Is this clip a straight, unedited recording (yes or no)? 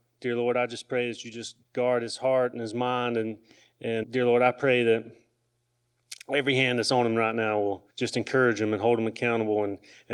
no